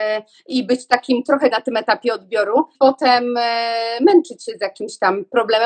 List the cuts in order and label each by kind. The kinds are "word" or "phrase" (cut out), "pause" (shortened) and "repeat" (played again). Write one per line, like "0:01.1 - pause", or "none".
0:01.5 - word
0:02.7 - word